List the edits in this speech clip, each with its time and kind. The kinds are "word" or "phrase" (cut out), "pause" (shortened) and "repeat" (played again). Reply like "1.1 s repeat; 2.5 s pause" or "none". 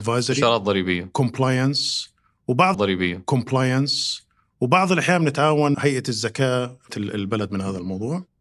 2.7 s repeat; 5.7 s word; 6.9 s phrase